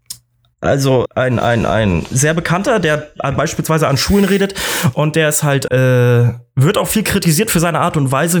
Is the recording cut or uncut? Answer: cut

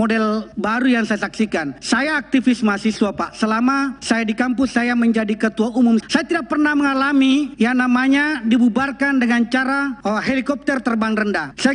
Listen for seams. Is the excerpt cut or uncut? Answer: cut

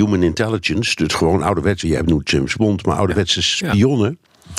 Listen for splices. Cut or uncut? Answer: uncut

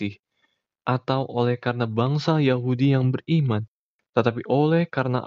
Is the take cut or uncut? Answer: uncut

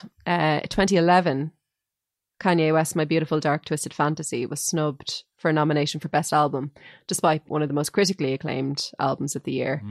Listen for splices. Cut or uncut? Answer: cut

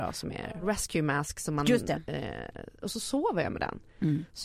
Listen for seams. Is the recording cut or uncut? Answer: uncut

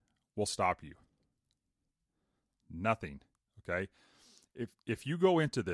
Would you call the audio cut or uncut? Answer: cut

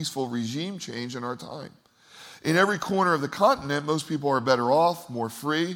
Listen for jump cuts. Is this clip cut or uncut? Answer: uncut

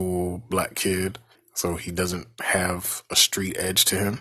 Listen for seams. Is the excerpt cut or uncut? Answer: cut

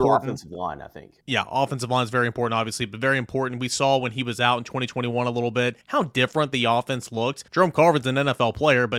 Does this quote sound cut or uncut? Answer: cut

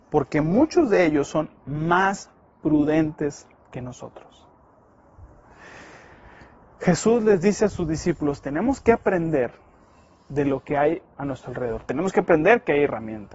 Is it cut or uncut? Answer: uncut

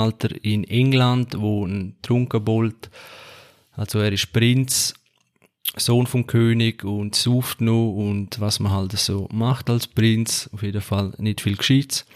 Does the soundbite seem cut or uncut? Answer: uncut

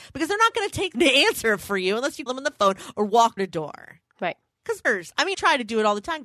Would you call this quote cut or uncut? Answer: cut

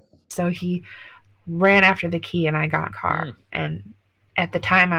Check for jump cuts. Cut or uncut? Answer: cut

